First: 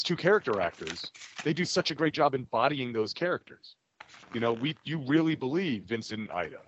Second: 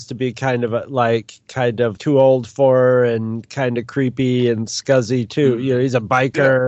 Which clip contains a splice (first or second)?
second